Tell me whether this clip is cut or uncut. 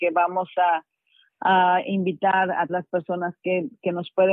cut